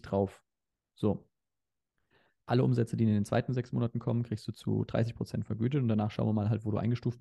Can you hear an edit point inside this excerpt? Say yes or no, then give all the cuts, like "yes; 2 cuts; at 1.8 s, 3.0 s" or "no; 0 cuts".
no; 0 cuts